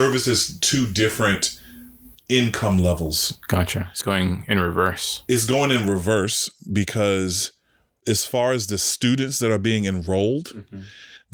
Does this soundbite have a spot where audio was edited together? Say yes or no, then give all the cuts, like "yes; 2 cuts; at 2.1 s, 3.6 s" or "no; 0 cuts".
yes; 3 cuts; at 2.1 s, 4.0 s, 8.0 s